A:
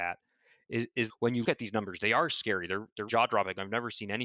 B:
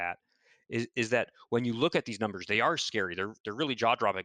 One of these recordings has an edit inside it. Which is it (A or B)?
A